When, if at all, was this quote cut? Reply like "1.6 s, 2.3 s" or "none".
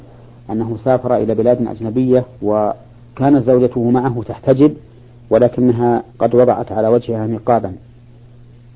2.3 s, 6.1 s